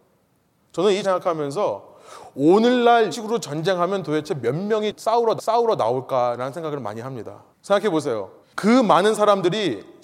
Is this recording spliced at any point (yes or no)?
yes